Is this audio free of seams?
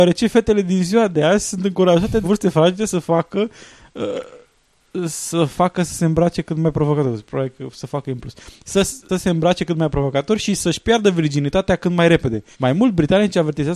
no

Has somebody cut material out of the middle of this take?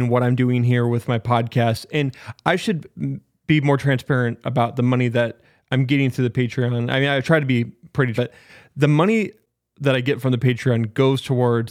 yes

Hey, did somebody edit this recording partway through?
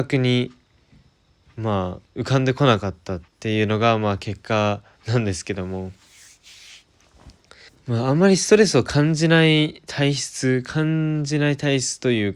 yes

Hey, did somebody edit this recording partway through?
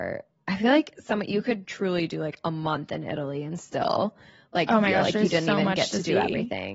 no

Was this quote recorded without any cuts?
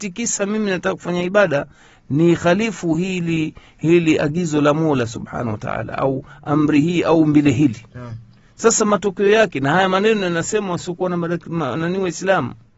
yes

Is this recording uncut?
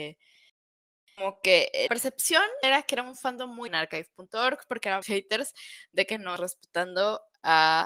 no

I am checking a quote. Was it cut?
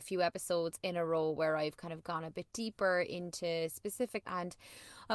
yes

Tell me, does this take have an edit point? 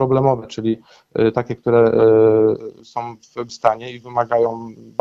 yes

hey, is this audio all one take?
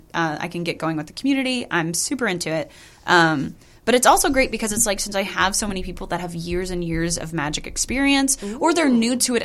yes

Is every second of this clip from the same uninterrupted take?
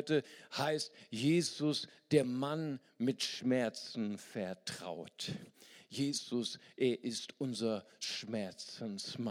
yes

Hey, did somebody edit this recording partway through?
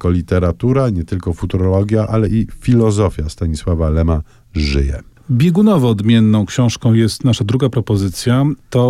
no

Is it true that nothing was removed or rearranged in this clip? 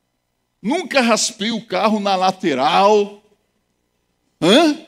yes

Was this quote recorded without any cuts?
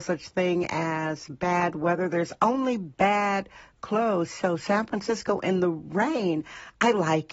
yes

